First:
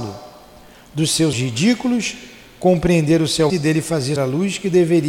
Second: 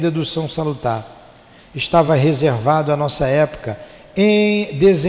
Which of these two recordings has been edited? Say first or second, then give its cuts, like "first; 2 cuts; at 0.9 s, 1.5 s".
first; 3 cuts; at 1.3 s, 3.5 s, 4.2 s